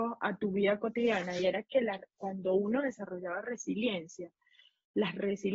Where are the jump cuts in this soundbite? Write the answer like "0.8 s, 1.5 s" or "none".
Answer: none